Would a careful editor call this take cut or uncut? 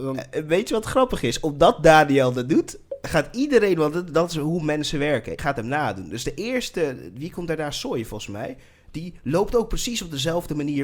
cut